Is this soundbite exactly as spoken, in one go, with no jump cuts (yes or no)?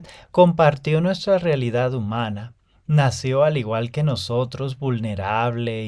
yes